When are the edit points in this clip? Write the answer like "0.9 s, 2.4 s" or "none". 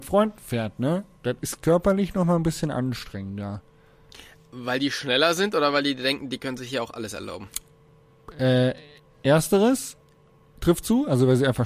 none